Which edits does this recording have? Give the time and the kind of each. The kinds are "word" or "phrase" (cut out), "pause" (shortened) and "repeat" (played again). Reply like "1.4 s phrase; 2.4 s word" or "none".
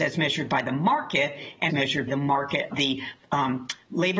1.7 s phrase; 2.1 s phrase; 2.7 s word